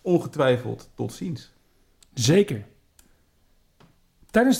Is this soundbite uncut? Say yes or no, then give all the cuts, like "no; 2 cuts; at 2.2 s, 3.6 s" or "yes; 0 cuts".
yes; 0 cuts